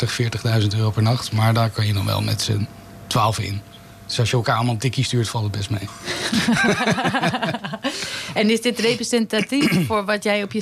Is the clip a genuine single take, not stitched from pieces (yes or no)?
yes